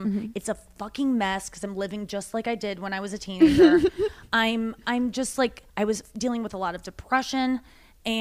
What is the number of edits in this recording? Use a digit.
1